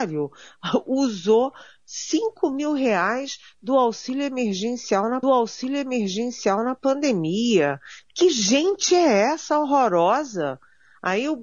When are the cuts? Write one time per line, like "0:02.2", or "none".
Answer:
0:05.2